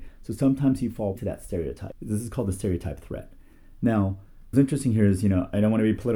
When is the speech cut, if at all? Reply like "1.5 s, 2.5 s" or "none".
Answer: 1.2 s, 4.5 s